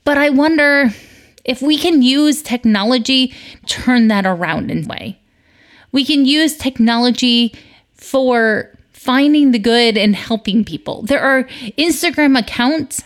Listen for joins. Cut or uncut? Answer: cut